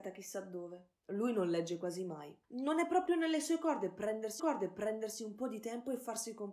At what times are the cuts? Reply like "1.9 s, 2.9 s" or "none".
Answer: 1.0 s, 2.4 s, 4.4 s